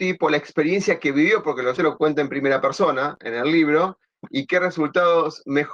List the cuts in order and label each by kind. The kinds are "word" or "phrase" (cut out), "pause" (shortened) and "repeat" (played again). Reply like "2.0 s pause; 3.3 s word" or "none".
1.8 s word